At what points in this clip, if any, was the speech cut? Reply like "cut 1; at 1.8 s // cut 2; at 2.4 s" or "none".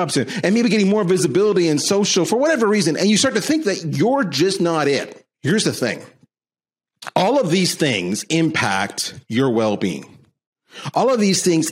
cut 1; at 5.3 s